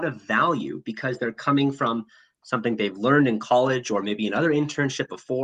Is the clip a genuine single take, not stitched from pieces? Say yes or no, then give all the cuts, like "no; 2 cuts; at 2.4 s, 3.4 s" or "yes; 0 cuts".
yes; 0 cuts